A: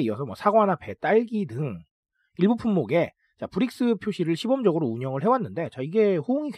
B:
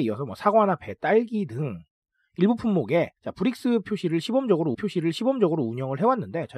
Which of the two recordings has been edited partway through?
B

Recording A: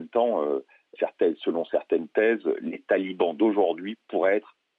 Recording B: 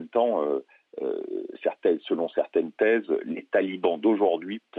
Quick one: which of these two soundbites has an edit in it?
A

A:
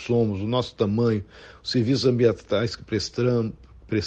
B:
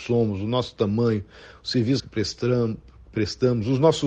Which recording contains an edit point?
B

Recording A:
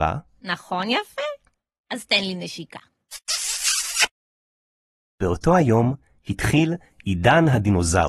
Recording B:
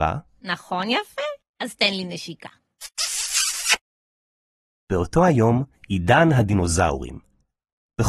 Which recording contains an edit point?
B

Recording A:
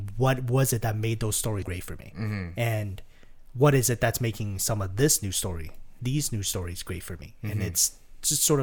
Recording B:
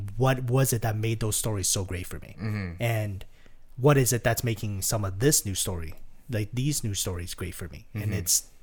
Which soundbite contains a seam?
A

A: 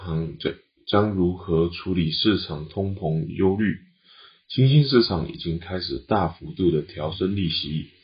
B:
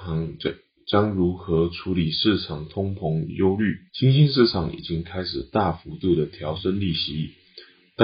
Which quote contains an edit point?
B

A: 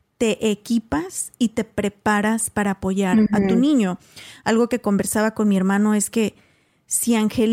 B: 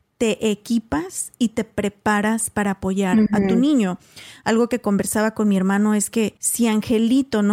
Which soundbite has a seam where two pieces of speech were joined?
B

